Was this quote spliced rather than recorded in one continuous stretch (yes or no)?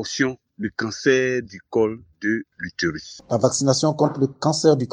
no